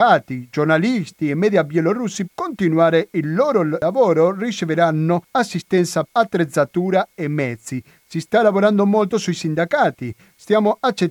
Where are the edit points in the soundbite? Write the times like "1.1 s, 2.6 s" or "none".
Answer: 2.3 s, 6.1 s